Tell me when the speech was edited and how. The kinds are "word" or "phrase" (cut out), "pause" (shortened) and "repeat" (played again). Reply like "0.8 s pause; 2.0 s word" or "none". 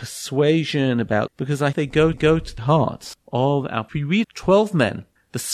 1.3 s word; 1.7 s word; 2.1 s repeat; 2.6 s word; 3.9 s phrase; 4.2 s word